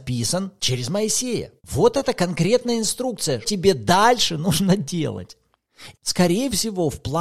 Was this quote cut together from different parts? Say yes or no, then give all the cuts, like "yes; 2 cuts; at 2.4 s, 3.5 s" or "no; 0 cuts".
yes; 2 cuts; at 1.6 s, 3.4 s